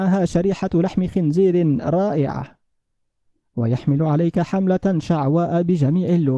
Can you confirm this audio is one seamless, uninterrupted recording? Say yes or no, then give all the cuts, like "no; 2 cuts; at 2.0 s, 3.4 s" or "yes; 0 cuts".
yes; 0 cuts